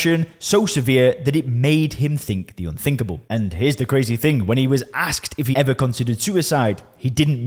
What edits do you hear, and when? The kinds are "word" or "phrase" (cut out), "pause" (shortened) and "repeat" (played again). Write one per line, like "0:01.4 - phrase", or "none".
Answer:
0:05.5 - word